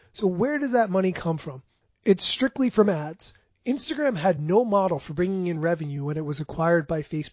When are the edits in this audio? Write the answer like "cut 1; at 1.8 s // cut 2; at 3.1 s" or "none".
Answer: none